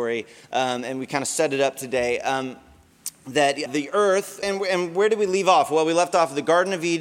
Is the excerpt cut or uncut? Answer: cut